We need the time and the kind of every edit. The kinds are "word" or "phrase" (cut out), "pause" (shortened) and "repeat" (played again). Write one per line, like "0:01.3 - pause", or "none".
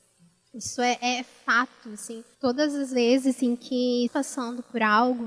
0:02.3 - pause
0:04.1 - word